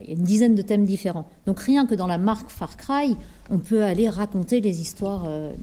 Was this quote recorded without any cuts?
yes; 0 cuts

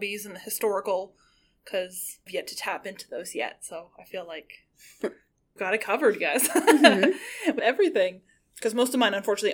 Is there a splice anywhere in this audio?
yes; 3 cuts; at 2.3 s, 5.6 s, 7.6 s

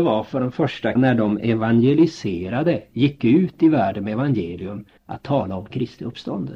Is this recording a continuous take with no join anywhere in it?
no; 2 cuts; at 1.0 s, 5.0 s

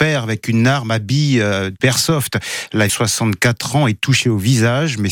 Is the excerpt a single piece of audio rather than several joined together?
no; 2 cuts; at 1.8 s, 2.9 s

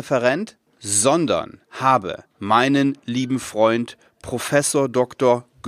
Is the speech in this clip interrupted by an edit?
yes; 1 cut; at 1.6 s

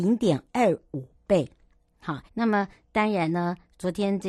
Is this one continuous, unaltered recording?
no; 1 cut; at 2.3 s

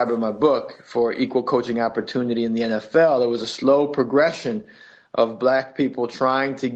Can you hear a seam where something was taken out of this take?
no; 0 cuts

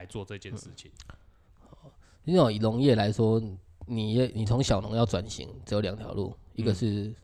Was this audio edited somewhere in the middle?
no; 0 cuts

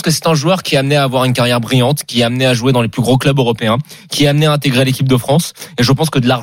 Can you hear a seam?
no; 0 cuts

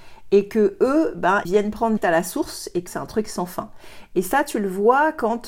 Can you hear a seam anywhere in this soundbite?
yes; 3 cuts; at 1.4 s, 2.0 s, 2.9 s

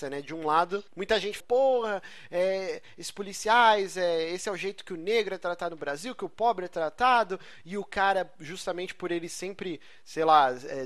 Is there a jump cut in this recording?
yes; 1 cut; at 1.4 s

